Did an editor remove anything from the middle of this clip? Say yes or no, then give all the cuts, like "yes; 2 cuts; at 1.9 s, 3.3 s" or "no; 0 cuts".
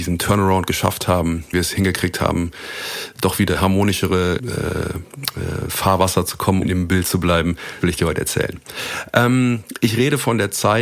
yes; 5 cuts; at 1.5 s, 3.5 s, 4.4 s, 6.6 s, 7.8 s